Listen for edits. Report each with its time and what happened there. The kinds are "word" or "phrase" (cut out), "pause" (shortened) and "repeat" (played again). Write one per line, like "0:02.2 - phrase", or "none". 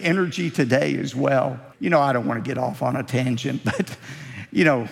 0:01.7 - pause